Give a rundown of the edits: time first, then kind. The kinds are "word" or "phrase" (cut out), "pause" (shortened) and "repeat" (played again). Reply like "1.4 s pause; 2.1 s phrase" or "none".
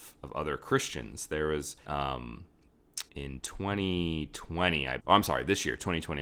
1.8 s word; 3.1 s pause; 5.0 s word